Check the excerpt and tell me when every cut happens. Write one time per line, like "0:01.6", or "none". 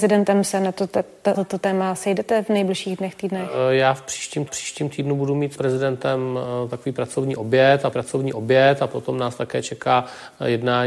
0:01.3
0:04.5
0:05.6
0:07.9

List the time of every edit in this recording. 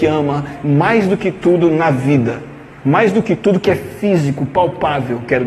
none

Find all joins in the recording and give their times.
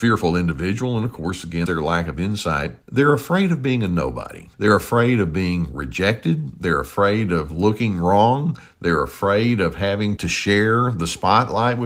0:01.7
0:02.8
0:04.5
0:10.2

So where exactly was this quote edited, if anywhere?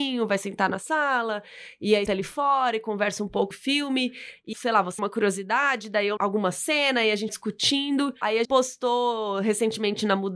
0:02.1
0:03.5
0:04.5
0:05.0
0:06.2
0:07.3
0:08.4

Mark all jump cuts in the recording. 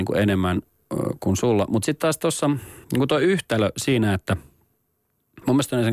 0:02.8

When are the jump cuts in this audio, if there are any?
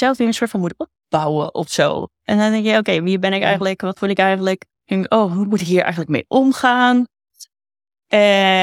0:04.7

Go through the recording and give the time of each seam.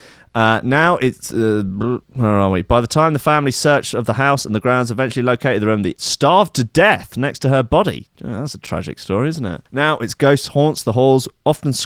0:02.0
0:06.0
0:09.7

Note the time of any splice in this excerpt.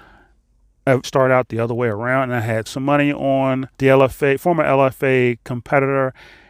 0:01.0
0:02.7
0:03.7

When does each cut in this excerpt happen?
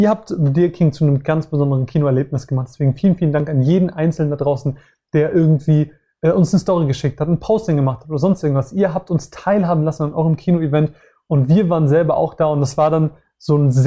none

